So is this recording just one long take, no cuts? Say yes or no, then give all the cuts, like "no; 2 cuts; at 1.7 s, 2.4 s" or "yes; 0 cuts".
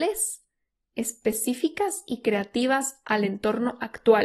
yes; 0 cuts